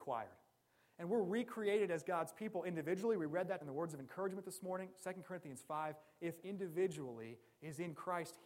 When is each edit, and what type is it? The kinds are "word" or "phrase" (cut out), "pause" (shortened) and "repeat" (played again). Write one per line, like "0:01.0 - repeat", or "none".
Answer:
0:03.6 - word
0:06.4 - word